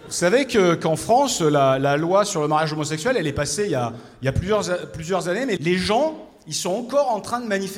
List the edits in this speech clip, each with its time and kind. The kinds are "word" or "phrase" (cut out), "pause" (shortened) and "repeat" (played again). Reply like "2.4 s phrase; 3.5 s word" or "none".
5.6 s word

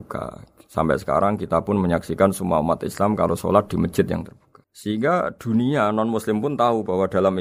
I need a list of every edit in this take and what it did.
4.6 s pause

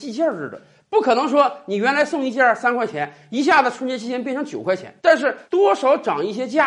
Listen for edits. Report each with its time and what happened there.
5.0 s pause; 5.4 s pause

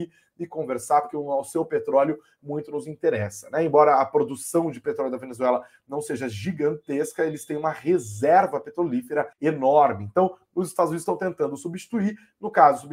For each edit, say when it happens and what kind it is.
9.3 s pause

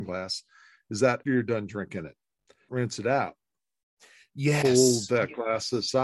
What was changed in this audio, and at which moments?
1.2 s word; 2.7 s word

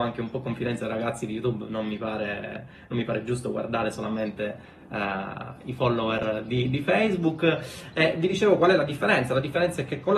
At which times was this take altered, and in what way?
none

